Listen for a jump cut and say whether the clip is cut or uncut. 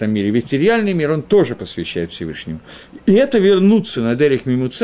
uncut